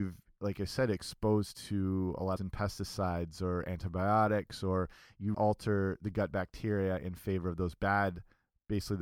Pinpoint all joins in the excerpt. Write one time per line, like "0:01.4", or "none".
0:02.4
0:05.3

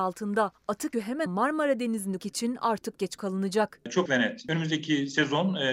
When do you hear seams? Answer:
0:00.9
0:01.3
0:02.2
0:03.0
0:04.1

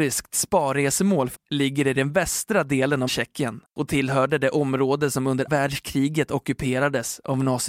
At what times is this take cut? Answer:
0:01.3
0:03.1
0:03.7
0:05.5

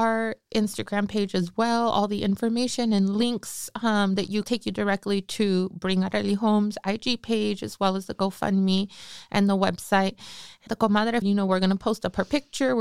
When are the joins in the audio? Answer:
0:04.4
0:10.7
0:11.2

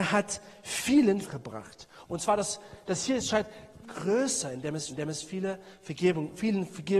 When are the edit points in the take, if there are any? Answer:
0:01.2
0:03.8
0:04.9

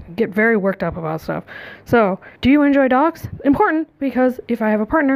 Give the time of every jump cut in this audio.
0:02.4

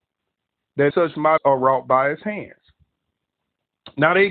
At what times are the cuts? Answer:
0:00.9
0:01.4

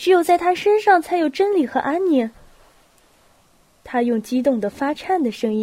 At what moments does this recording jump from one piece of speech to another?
none

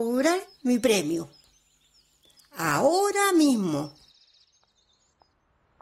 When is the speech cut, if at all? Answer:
none

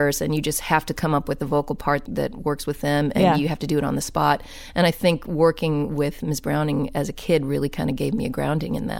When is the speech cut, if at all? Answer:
0:02.1

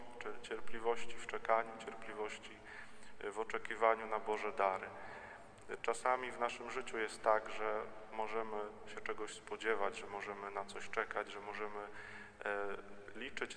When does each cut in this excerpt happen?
none

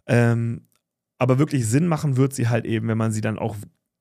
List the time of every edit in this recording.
none

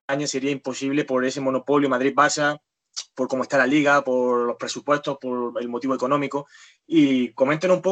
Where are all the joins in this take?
none

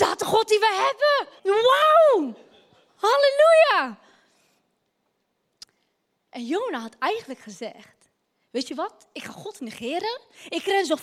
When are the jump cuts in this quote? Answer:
0:01.4

